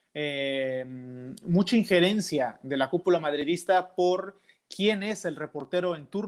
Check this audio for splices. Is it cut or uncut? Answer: uncut